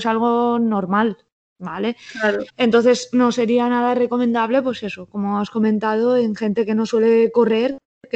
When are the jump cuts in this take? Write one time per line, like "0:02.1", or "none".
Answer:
0:02.5

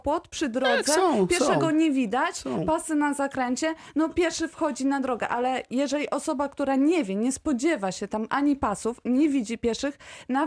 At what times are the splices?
none

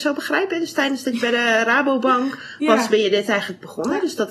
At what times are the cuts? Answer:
none

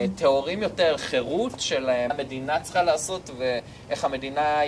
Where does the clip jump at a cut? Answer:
0:01.0
0:02.1

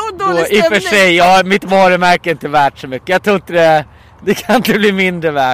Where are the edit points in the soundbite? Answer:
none

